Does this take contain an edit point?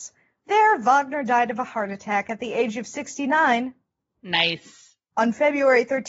no; 0 cuts

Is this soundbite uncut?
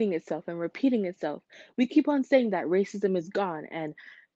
yes; 0 cuts

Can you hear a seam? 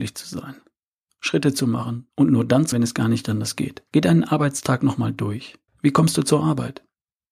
yes; 3 cuts; at 2.7 s, 3.9 s, 5.7 s

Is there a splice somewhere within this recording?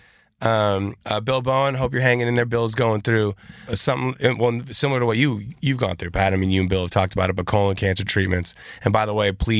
yes; 2 cuts; at 1.0 s, 3.7 s

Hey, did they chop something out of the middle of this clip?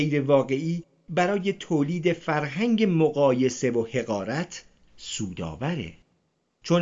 no; 0 cuts

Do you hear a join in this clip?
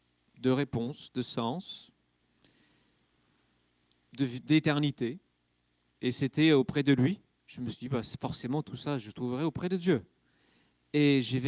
no; 0 cuts

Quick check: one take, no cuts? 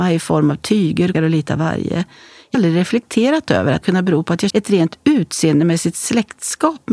no; 4 cuts; at 1.1 s, 2.5 s, 3.8 s, 4.5 s

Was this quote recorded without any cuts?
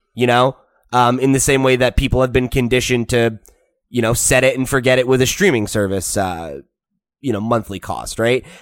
yes; 0 cuts

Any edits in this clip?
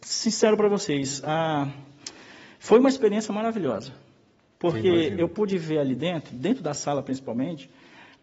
no; 0 cuts

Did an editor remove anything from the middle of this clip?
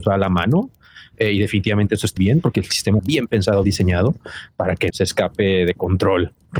yes; 4 cuts; at 2.2 s, 3.0 s, 3.6 s, 4.9 s

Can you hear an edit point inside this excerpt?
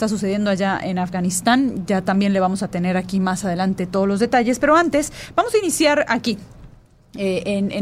no; 0 cuts

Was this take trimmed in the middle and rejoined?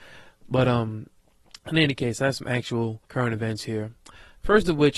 yes; 2 cuts; at 1.2 s, 3.0 s

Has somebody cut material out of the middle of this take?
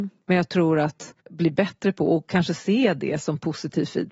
yes; 1 cut; at 1.2 s

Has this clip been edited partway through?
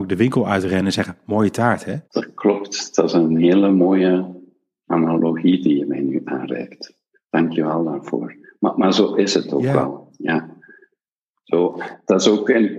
yes; 3 cuts; at 2.0 s, 4.9 s, 8.4 s

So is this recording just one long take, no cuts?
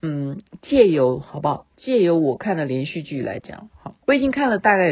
no; 1 cut; at 4.0 s

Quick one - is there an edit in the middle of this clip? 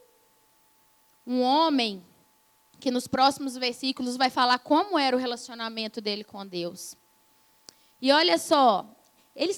no; 0 cuts

